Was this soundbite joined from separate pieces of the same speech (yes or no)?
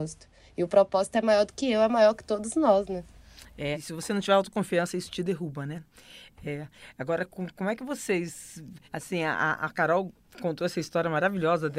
yes